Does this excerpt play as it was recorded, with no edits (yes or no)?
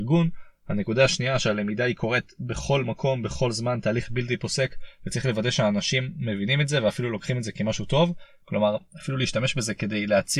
yes